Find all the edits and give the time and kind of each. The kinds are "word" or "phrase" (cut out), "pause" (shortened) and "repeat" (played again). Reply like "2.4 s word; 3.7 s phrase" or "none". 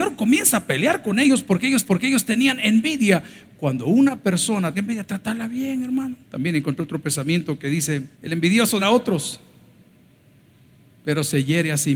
1.9 s repeat; 4.7 s phrase; 6.2 s pause; 8.1 s pause; 8.8 s word